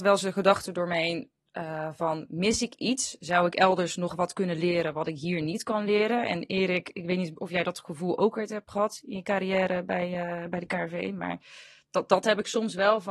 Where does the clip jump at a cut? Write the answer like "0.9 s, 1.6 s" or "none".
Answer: none